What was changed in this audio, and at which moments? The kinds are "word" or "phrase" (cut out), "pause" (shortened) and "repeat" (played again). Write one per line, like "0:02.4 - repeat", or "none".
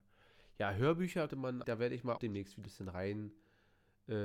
0:01.3 - word
0:01.6 - word
0:02.2 - word
0:02.6 - word